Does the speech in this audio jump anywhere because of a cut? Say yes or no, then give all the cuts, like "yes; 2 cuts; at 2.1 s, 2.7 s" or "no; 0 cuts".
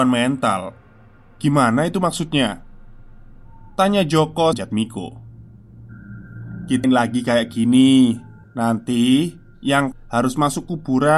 yes; 5 cuts; at 3.7 s, 4.5 s, 6.8 s, 8.4 s, 9.9 s